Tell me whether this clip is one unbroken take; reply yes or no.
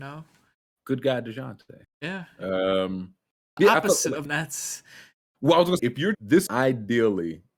no